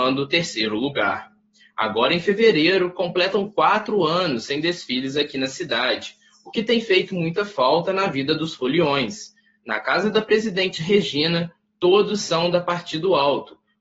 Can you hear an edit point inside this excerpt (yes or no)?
no